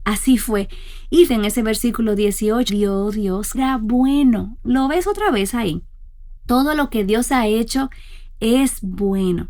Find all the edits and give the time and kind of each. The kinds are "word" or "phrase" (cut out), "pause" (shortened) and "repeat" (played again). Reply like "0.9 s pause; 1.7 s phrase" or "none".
1.3 s word; 2.7 s phrase; 3.5 s word